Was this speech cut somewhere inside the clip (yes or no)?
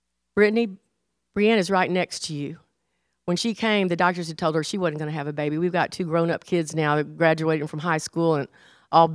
no